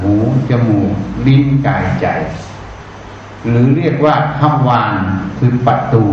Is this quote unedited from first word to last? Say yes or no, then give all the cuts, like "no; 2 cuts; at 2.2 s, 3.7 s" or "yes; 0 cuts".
yes; 0 cuts